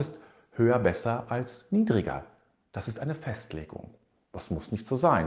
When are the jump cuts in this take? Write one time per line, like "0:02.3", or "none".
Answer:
none

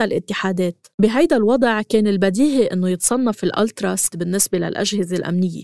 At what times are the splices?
0:00.9
0:04.1

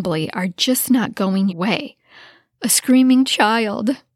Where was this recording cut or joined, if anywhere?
0:01.5

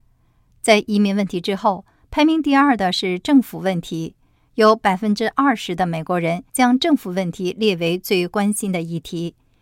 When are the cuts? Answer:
0:06.5

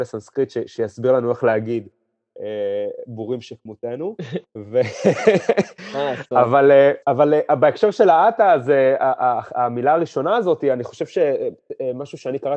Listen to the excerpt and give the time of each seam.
0:07.0

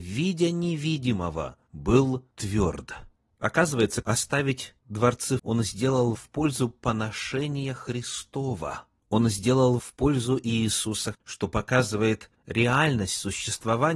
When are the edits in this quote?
0:04.0
0:05.4
0:06.1
0:09.8
0:11.1

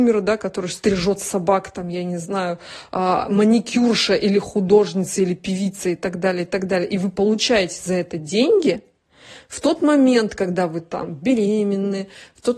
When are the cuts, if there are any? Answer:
none

